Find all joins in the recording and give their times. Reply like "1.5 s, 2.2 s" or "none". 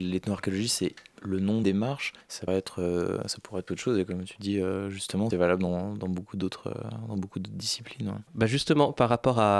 1.6 s, 2.5 s, 3.7 s, 5.3 s, 8.3 s